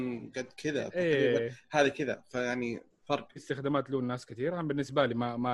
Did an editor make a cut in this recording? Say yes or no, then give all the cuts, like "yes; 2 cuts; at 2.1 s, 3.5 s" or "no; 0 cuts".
yes; 1 cut; at 3.4 s